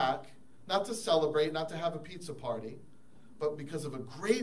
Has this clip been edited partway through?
no; 0 cuts

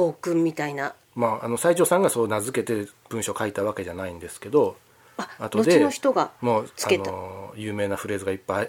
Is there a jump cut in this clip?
yes; 1 cut; at 1.0 s

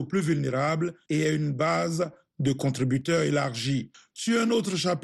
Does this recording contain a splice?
no; 0 cuts

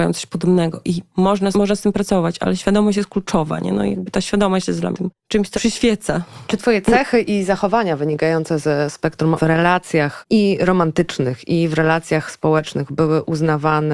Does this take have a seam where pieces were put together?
yes; 4 cuts; at 1.5 s, 4.9 s, 5.5 s, 9.4 s

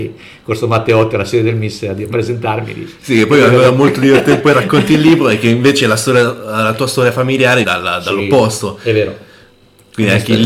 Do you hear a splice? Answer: yes; 2 cuts; at 4.4 s, 7.6 s

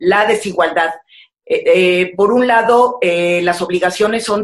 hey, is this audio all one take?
yes; 0 cuts

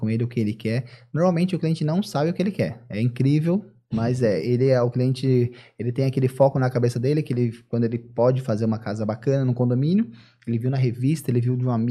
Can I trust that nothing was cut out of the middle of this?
yes; 0 cuts

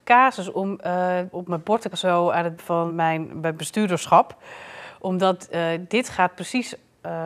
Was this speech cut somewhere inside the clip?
yes; 4 cuts; at 1.3 s, 1.9 s, 2.6 s, 2.9 s

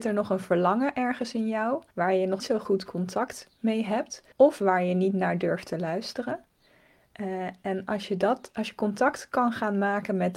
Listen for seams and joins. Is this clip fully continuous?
no; 3 cuts; at 1.9 s, 2.4 s, 4.3 s

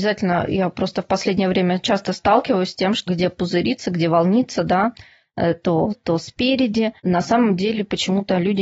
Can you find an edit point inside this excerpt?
yes; 3 cuts; at 3.1 s, 5.9 s, 7.0 s

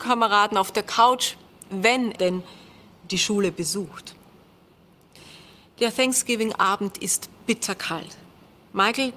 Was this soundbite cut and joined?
yes; 2 cuts; at 2.1 s, 5.6 s

